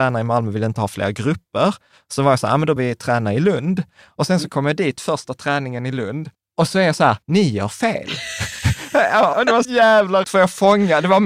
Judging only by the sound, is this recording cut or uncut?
cut